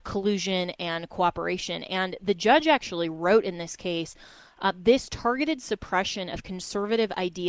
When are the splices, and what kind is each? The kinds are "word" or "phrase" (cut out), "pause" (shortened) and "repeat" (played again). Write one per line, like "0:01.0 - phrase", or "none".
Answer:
none